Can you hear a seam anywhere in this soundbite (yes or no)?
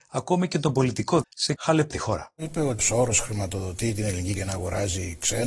yes